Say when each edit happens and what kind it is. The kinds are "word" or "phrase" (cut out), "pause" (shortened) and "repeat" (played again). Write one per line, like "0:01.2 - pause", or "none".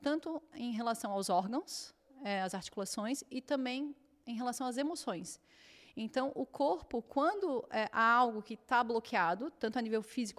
none